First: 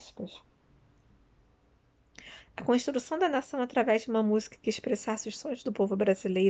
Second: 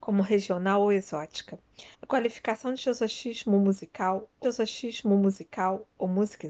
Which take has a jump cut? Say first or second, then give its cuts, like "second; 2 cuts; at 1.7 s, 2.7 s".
second; 2 cuts; at 1.9 s, 4.4 s